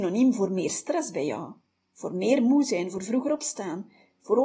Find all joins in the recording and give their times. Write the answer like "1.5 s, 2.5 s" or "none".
none